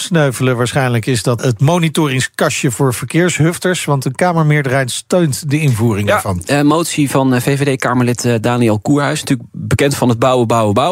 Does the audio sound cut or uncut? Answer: cut